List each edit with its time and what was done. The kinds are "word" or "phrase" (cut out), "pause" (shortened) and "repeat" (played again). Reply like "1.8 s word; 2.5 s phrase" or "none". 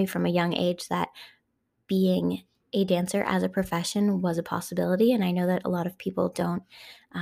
none